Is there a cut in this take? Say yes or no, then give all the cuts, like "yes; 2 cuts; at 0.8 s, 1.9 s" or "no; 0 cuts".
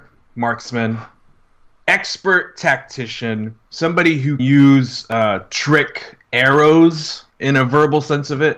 yes; 3 cuts; at 3.7 s, 4.4 s, 7.3 s